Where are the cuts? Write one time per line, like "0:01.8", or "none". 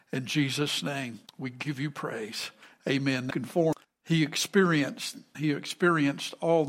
0:01.3
0:02.6
0:03.3
0:03.8
0:05.3